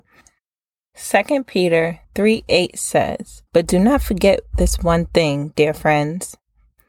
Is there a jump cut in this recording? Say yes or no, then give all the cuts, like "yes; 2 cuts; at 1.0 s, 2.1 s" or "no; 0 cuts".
yes; 2 cuts; at 2.0 s, 3.5 s